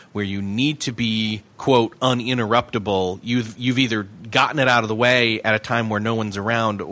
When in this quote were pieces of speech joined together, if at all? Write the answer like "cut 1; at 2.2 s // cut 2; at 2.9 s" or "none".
cut 1; at 1.5 s